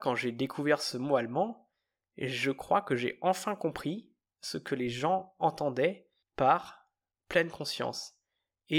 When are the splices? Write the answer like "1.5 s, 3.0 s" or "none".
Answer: none